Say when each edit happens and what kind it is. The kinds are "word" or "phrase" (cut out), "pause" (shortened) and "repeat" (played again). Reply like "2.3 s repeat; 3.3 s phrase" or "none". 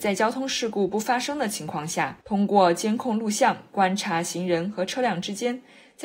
2.2 s pause